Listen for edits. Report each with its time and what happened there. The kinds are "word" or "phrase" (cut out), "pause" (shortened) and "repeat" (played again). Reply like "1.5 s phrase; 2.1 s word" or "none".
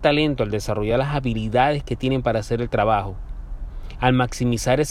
none